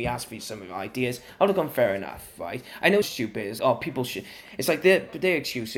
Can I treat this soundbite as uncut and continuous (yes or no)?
no